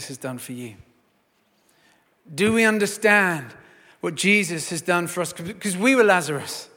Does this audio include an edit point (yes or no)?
no